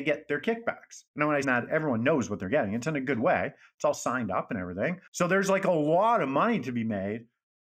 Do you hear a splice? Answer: yes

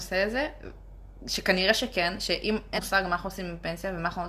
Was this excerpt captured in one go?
no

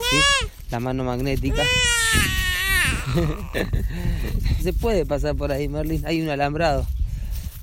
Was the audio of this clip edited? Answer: yes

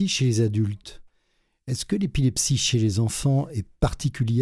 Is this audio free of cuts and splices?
yes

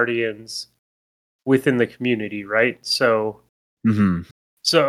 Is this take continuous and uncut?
yes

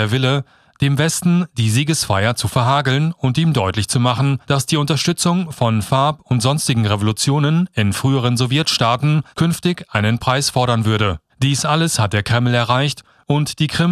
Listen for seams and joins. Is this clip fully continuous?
no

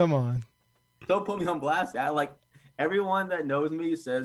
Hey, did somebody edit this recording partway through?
yes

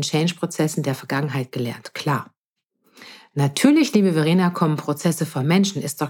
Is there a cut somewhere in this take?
no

